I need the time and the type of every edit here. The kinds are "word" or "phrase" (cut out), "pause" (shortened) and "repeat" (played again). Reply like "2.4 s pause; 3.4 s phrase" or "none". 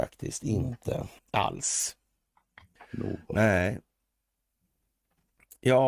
1.2 s pause